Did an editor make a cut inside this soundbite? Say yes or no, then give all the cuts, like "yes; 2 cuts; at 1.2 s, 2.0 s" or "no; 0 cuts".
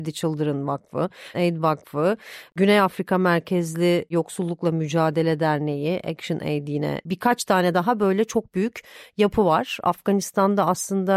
yes; 1 cut; at 1.3 s